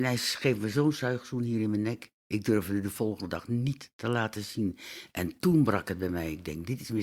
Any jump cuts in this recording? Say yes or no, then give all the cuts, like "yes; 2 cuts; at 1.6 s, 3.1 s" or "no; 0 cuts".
yes; 1 cut; at 2.2 s